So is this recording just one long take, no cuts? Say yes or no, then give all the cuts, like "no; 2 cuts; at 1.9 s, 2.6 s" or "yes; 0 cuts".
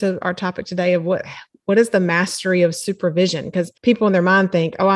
no; 1 cut; at 3.8 s